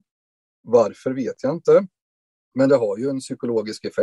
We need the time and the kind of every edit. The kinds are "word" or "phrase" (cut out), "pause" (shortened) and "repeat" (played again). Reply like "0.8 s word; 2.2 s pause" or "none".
none